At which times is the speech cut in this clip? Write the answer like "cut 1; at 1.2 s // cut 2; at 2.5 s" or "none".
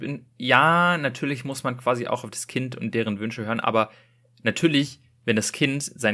none